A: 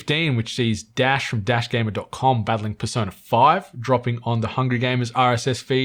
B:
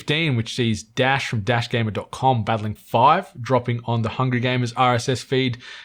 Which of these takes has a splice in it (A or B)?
B